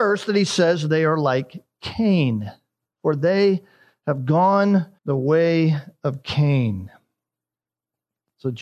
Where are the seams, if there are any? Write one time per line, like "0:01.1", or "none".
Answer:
0:05.0